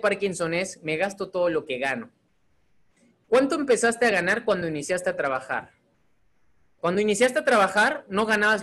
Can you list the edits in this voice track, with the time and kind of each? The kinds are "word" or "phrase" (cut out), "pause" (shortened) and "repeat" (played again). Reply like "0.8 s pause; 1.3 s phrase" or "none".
none

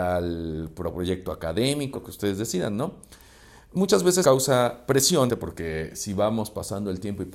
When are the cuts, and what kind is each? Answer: 1.9 s word; 4.2 s word; 5.3 s word

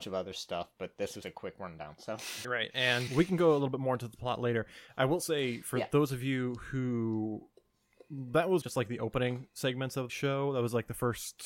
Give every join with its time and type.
1.2 s word; 2.4 s word; 3.1 s word; 8.6 s word; 10.1 s word

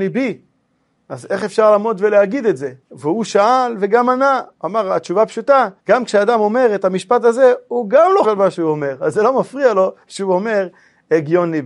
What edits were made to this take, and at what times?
2.8 s pause; 5.8 s pause; 8.2 s word

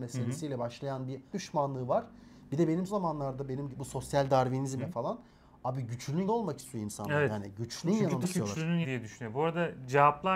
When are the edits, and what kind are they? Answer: 1.3 s word; 2.9 s word; 3.7 s word; 4.8 s word; 6.3 s word; 7.8 s word; 8.2 s word; 8.8 s word

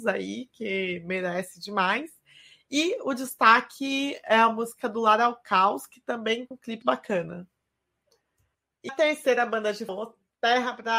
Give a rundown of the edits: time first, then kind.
6.5 s word; 6.8 s word; 8.9 s word; 9.9 s word

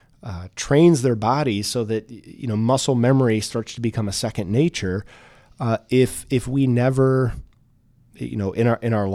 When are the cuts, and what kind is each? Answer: none

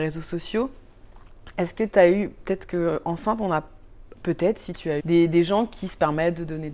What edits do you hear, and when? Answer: 5.0 s word

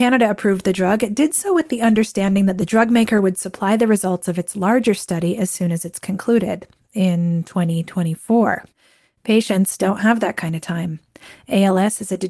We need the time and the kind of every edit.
none

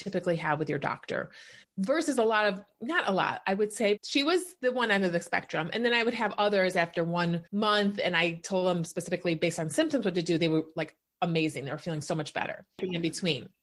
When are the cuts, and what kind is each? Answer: 1.6 s pause; 4.0 s word; 7.5 s pause

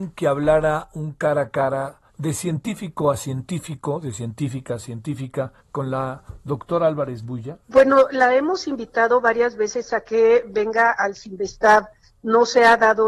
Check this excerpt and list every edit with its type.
2.1 s pause; 5.6 s pause; 7.6 s pause

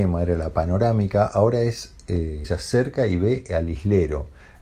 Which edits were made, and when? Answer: 2.4 s phrase

